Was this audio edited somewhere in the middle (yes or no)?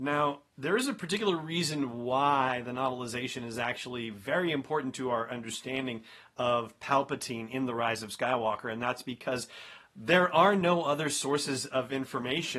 no